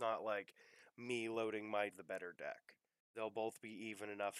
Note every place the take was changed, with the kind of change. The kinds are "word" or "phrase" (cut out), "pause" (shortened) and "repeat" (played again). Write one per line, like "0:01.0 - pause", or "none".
0:01.9 - phrase
0:03.0 - pause